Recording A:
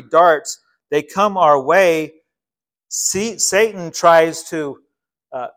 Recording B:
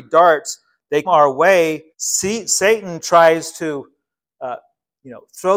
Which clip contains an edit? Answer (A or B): B